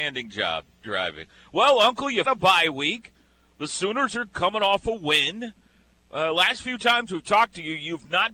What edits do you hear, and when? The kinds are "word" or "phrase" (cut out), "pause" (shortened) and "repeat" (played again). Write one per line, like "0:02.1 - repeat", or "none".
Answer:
0:02.2 - word